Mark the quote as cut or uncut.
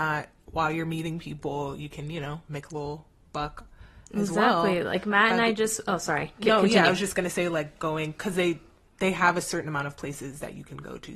uncut